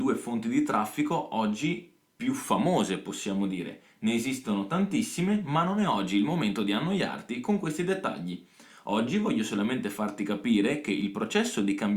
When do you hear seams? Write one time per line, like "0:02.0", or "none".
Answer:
none